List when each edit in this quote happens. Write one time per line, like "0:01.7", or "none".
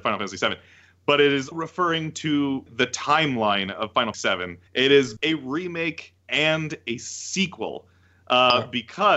0:01.5
0:02.7
0:04.1
0:04.7
0:05.2
0:06.2